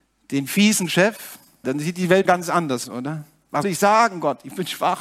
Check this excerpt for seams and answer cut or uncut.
cut